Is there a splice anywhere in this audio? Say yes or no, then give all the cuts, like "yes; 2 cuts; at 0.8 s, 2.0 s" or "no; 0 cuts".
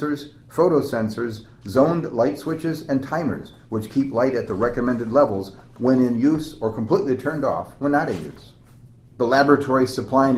no; 0 cuts